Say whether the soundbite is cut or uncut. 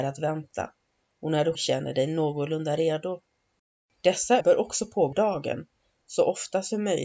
cut